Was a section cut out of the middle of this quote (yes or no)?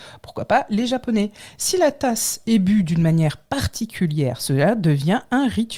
no